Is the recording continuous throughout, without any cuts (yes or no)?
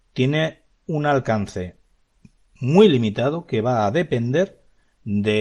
yes